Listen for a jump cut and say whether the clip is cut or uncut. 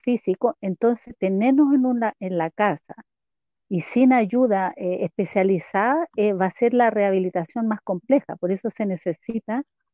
uncut